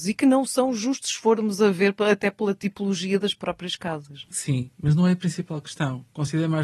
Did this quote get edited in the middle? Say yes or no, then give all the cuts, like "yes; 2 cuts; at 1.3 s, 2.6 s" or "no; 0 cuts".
yes; 1 cut; at 4.3 s